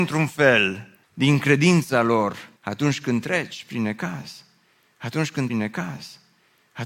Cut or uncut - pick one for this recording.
cut